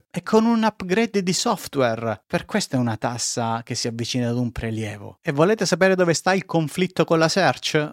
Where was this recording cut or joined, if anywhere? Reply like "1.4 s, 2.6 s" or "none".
none